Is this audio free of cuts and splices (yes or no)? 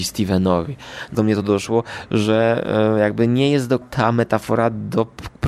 no